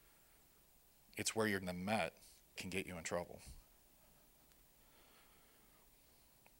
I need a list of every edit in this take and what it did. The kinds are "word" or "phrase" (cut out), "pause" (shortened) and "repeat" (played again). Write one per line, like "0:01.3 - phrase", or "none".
0:01.6 - word
0:02.6 - word